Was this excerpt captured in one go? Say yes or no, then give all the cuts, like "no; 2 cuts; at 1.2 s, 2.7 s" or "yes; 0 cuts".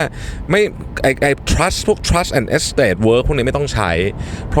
yes; 0 cuts